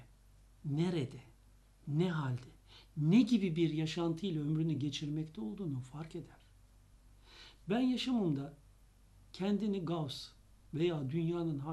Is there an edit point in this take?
no; 0 cuts

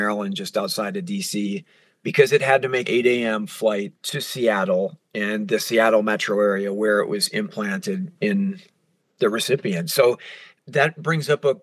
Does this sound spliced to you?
yes; 3 cuts; at 2.8 s, 3.9 s, 5.0 s

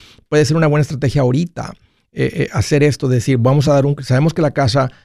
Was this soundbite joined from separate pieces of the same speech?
no; 0 cuts

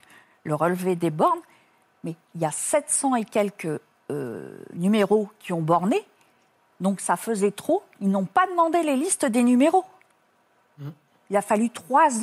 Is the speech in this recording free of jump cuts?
yes; 0 cuts

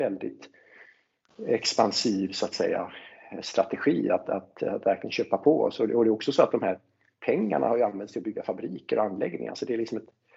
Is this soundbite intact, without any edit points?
yes; 0 cuts

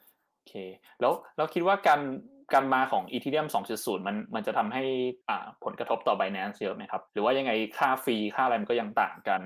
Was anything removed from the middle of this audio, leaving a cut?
yes; 2 cuts; at 5.2 s, 7.1 s

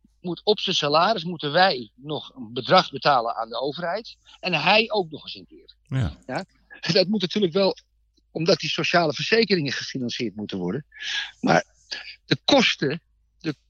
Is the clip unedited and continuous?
yes; 0 cuts

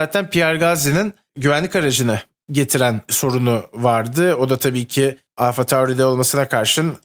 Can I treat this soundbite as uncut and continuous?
yes; 0 cuts

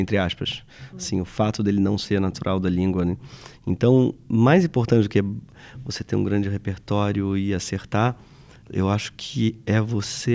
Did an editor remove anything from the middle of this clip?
no; 0 cuts

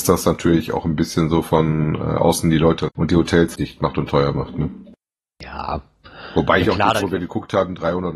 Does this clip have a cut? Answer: yes; 4 cuts; at 2.9 s, 3.5 s, 6.6 s, 7.0 s

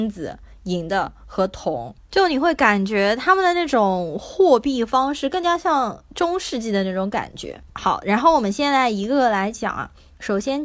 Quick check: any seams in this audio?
yes; 2 cuts; at 2.0 s, 7.7 s

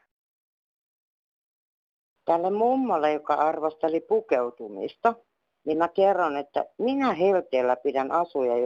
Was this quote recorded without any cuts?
yes; 0 cuts

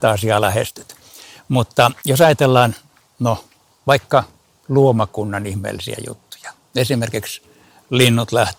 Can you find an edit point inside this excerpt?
no; 0 cuts

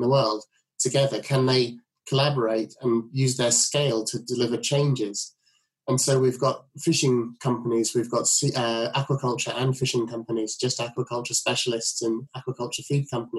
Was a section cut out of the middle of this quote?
no; 0 cuts

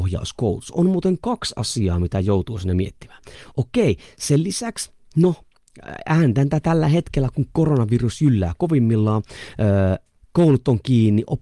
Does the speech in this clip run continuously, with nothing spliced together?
yes; 0 cuts

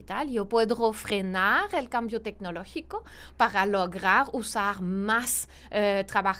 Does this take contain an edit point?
no; 0 cuts

